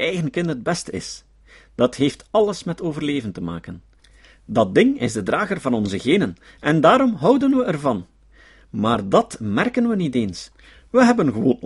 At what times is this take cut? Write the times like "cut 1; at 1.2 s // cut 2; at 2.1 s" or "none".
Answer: none